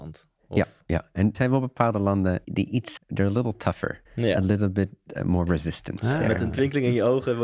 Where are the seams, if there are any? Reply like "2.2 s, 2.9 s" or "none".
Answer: 1.3 s, 2.4 s, 3.0 s, 4.1 s